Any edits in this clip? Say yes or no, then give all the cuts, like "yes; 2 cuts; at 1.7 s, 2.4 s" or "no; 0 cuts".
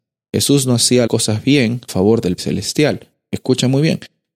yes; 3 cuts; at 1.1 s, 1.9 s, 2.4 s